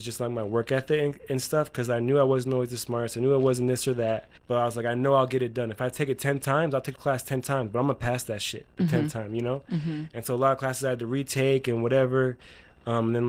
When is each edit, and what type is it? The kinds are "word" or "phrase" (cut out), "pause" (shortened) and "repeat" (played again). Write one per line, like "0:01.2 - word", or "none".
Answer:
0:04.4 - pause